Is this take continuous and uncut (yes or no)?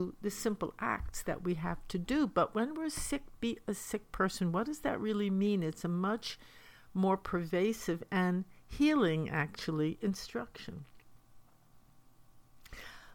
yes